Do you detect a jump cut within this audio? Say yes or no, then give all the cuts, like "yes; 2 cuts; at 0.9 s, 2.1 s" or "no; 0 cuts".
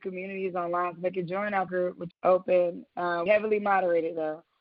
yes; 3 cuts; at 1.7 s, 2.1 s, 3.3 s